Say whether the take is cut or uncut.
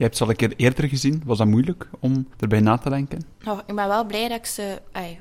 cut